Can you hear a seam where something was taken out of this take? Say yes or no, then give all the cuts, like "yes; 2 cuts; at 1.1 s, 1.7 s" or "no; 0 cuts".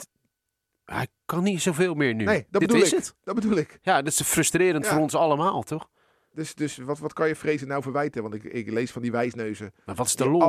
no; 0 cuts